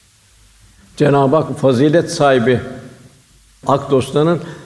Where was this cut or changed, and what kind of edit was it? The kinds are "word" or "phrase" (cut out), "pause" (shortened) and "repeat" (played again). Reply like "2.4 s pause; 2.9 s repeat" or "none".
1.5 s word; 3.6 s word